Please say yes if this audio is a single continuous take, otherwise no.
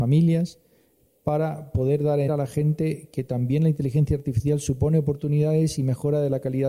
no